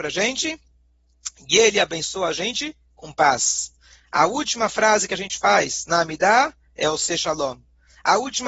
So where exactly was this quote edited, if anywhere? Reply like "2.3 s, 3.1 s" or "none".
none